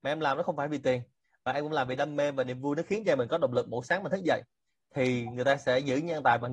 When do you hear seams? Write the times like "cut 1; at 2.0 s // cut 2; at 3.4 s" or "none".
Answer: none